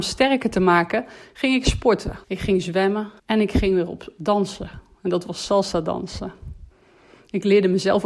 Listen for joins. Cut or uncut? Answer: cut